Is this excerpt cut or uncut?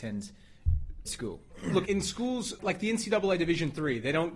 cut